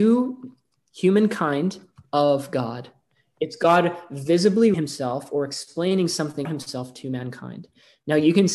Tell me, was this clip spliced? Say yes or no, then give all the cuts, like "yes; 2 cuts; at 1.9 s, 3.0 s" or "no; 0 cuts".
yes; 2 cuts; at 4.7 s, 6.4 s